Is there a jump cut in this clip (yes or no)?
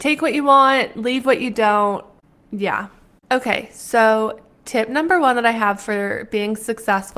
no